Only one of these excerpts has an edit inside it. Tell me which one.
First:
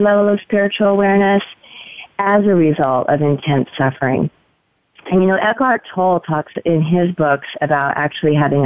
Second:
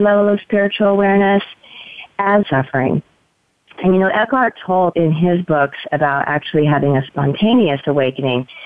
second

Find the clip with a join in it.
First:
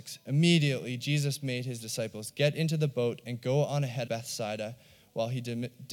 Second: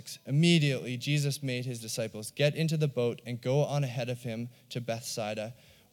first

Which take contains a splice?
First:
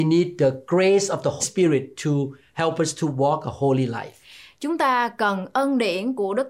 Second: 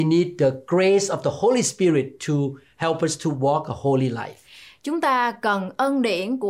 first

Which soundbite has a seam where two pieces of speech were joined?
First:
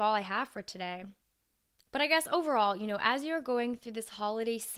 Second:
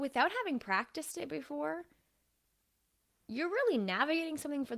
first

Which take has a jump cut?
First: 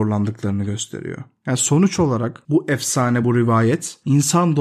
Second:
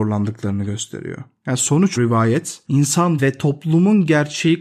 second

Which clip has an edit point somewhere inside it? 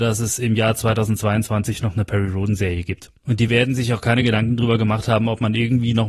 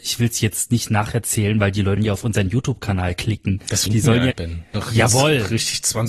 second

